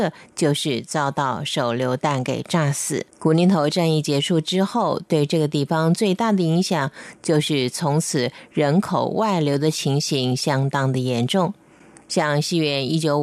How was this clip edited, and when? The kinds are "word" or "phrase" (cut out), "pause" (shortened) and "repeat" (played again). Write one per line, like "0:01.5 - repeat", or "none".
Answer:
0:03.1 - pause